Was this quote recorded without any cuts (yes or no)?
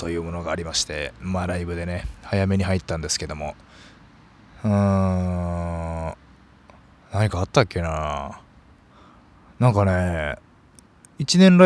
yes